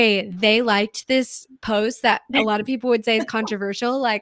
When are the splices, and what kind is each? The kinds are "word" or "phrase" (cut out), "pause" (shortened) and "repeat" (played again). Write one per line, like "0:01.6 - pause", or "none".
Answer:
none